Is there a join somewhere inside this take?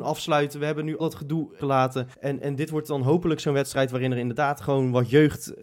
yes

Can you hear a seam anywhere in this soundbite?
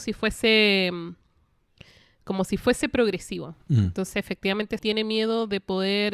yes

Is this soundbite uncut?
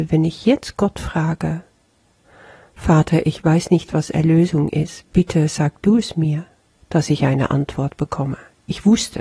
yes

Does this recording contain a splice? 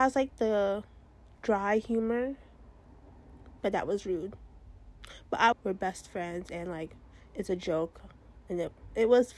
yes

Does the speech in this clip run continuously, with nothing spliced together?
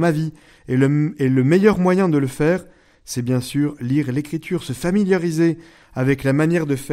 yes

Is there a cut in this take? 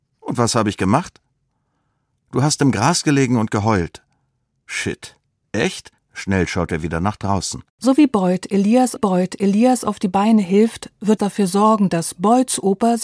yes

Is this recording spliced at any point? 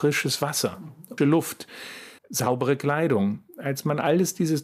yes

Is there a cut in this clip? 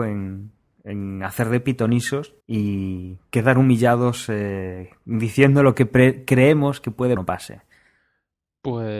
yes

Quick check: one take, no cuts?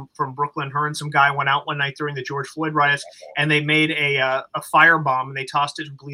yes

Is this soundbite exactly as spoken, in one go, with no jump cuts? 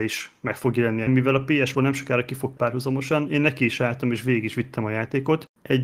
no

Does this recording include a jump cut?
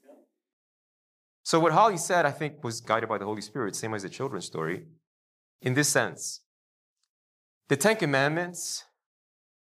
no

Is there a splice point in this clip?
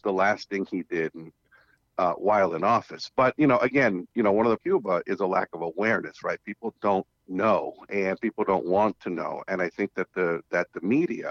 yes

